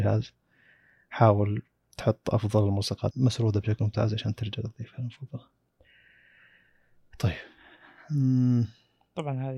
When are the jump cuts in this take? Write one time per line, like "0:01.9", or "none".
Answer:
0:03.1